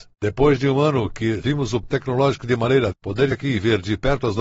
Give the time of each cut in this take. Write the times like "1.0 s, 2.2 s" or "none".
1.4 s, 1.8 s, 2.9 s, 3.3 s